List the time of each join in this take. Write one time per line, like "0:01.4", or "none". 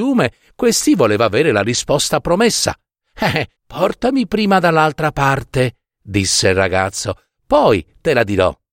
0:03.6